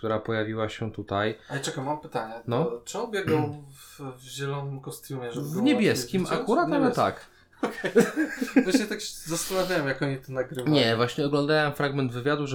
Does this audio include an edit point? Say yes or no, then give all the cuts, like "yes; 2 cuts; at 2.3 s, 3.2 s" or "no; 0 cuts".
no; 0 cuts